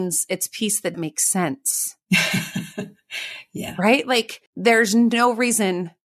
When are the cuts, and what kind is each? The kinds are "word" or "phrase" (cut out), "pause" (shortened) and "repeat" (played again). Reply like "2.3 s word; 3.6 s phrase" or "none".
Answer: 0.9 s word; 4.5 s pause

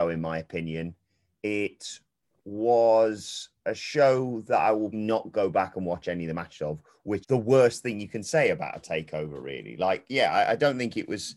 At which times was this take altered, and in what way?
4.9 s word; 7.2 s word

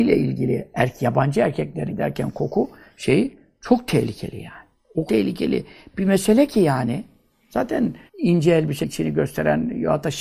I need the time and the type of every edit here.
1.9 s word; 5.1 s word; 8.1 s pause; 8.8 s word

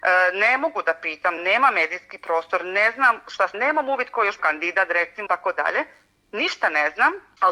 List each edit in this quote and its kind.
1.4 s word; 3.5 s word; 4.4 s word; 5.3 s word

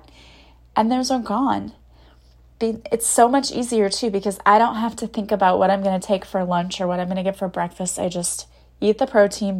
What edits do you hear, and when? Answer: none

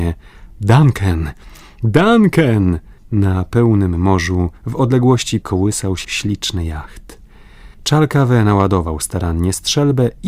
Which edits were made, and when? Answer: 3.0 s pause; 4.6 s pause; 5.4 s phrase; 6.0 s word; 7.7 s pause

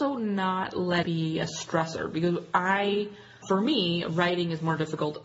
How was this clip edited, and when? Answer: 1.0 s word; 3.4 s word

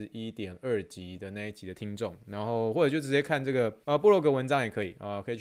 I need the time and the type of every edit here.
3.8 s pause

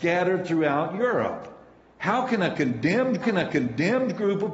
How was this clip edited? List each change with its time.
3.2 s repeat

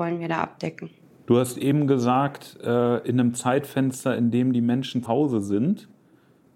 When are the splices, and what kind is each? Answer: 5.0 s word

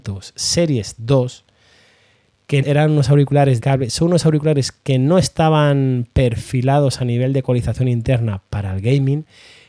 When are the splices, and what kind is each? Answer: 2.6 s word; 3.6 s word

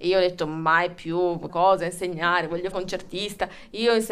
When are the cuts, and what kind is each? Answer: 1.5 s phrase; 2.7 s word

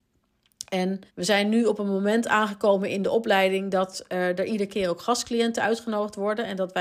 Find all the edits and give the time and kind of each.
1.1 s pause

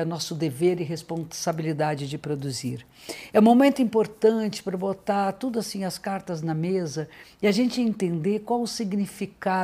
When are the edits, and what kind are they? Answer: none

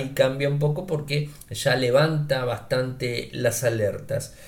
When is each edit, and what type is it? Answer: none

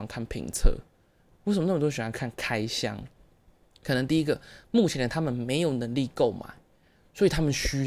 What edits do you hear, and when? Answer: none

